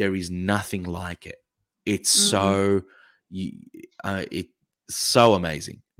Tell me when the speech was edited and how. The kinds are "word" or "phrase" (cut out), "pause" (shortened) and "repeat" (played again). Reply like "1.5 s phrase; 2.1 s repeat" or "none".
none